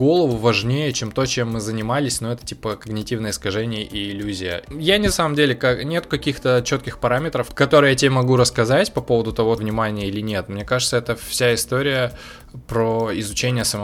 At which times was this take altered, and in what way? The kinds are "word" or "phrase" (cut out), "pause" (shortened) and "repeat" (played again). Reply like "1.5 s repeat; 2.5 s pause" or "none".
5.1 s phrase; 9.6 s phrase

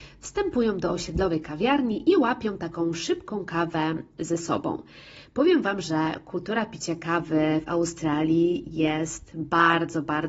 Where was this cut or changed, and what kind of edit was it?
none

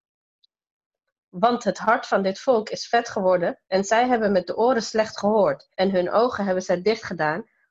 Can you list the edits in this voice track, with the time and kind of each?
3.6 s pause; 5.7 s pause

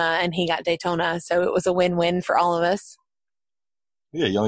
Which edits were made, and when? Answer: none

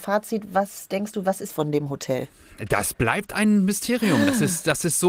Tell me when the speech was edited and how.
1.5 s phrase

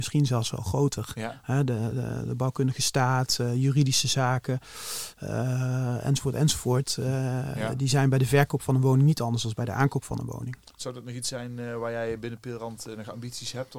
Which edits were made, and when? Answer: none

